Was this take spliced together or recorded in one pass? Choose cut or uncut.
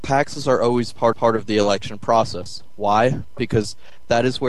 cut